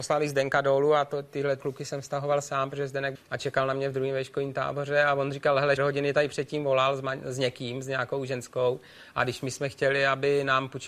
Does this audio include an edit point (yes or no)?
yes